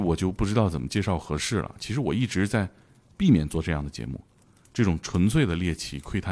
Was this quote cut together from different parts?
no; 0 cuts

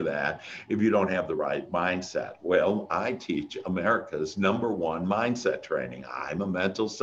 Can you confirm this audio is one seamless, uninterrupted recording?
yes; 0 cuts

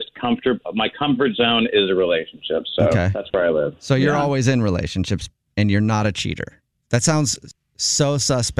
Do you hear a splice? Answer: no; 0 cuts

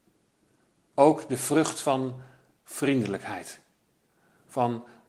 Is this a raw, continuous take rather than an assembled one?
yes; 0 cuts

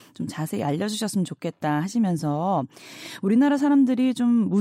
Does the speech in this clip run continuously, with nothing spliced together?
yes; 0 cuts

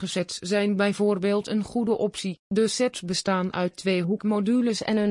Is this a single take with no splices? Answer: no; 1 cut; at 2.4 s

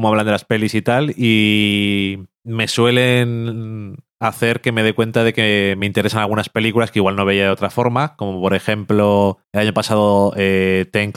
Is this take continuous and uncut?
yes; 0 cuts

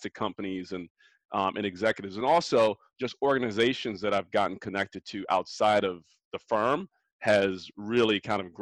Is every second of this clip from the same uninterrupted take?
yes; 0 cuts

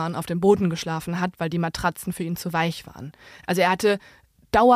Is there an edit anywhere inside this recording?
no; 0 cuts

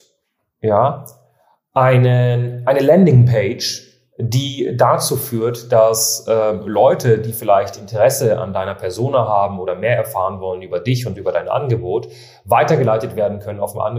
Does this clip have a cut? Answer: no; 0 cuts

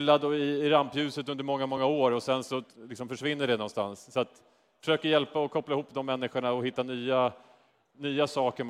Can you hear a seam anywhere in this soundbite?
no; 0 cuts

